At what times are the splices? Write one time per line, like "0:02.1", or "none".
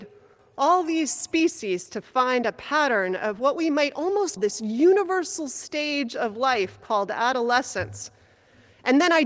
0:04.4